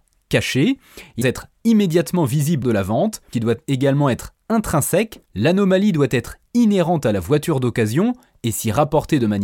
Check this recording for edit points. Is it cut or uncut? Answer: cut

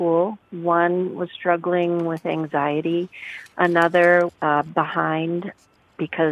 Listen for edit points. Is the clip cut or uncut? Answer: cut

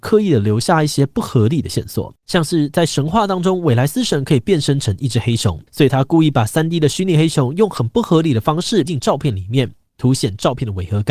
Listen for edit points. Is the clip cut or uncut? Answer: cut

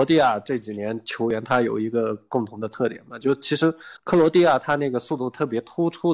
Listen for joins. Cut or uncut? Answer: cut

